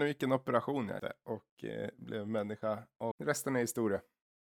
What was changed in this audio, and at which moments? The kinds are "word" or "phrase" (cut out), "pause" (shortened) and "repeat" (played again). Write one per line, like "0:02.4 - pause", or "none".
0:01.0 - word
0:03.1 - phrase